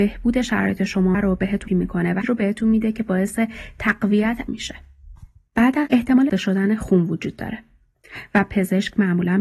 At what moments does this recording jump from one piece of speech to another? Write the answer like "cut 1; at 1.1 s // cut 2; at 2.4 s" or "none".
cut 1; at 1.1 s // cut 2; at 1.7 s // cut 3; at 2.2 s // cut 4; at 4.5 s // cut 5; at 5.9 s // cut 6; at 6.3 s